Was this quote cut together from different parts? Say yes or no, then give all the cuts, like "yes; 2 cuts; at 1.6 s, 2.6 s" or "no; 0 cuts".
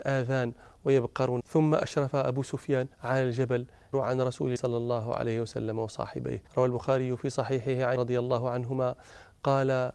yes; 6 cuts; at 1.4 s, 2.9 s, 3.9 s, 4.6 s, 6.5 s, 8.0 s